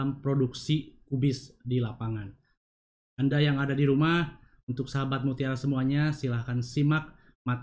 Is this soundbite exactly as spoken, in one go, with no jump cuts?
yes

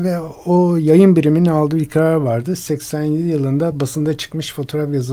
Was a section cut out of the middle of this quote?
no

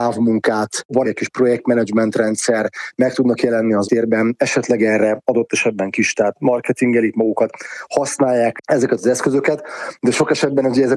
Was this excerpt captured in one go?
no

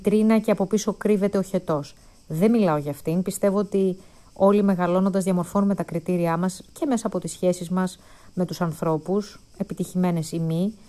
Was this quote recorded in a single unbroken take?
yes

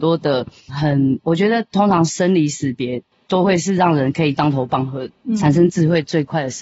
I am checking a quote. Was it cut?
no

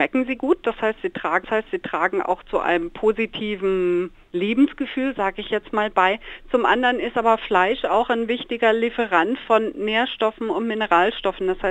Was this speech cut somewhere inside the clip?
yes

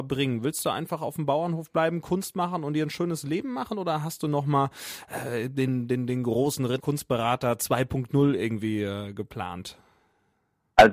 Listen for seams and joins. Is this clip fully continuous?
no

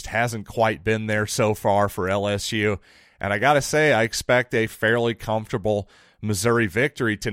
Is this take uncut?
yes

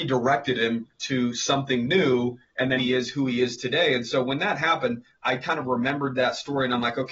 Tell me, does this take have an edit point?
yes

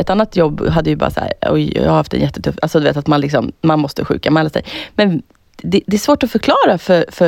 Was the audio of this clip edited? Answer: no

